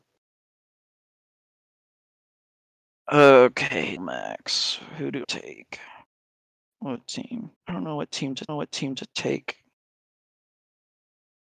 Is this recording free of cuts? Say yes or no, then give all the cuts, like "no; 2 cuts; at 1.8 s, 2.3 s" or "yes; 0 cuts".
no; 4 cuts; at 4.0 s, 5.2 s, 7.6 s, 8.5 s